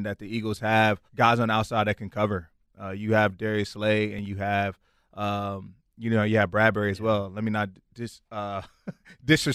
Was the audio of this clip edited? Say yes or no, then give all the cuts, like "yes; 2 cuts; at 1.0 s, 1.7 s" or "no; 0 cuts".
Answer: yes; 2 cuts; at 1.1 s, 8.2 s